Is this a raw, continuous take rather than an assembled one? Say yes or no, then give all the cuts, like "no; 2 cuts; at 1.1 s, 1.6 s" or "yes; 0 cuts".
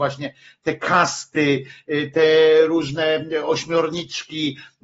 yes; 0 cuts